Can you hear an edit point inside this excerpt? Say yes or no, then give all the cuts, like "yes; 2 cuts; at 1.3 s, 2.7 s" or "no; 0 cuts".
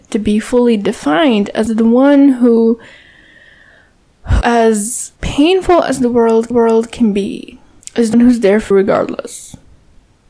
yes; 7 cuts; at 1.7 s, 4.4 s, 5.2 s, 6.5 s, 7.8 s, 8.1 s, 8.7 s